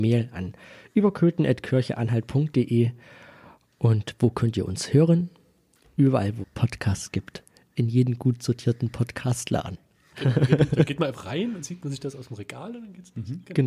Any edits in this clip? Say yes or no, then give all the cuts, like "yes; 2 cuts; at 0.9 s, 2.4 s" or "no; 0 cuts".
yes; 3 cuts; at 6.4 s, 11.1 s, 11.6 s